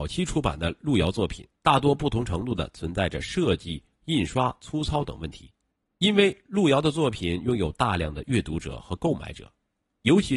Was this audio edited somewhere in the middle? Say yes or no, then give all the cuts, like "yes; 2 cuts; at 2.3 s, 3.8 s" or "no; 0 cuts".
yes; 2 cuts; at 1.6 s, 5.7 s